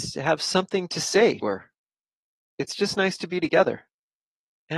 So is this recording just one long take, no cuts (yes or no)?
no